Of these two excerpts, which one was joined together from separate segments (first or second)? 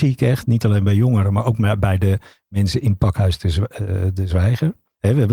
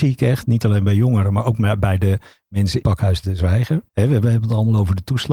second